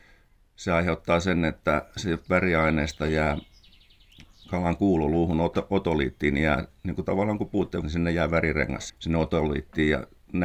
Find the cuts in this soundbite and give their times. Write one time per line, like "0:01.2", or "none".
0:07.8
0:08.9